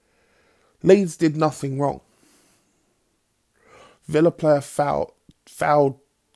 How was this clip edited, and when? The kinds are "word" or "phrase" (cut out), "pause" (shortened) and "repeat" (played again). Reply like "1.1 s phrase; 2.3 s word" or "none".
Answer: none